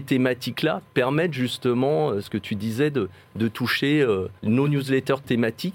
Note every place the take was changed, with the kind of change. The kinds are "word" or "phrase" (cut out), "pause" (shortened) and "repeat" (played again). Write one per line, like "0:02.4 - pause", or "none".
0:04.4 - pause